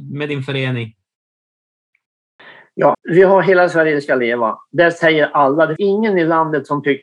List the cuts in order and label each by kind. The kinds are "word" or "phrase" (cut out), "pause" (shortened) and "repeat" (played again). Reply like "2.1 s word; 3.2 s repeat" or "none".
2.9 s word; 5.8 s word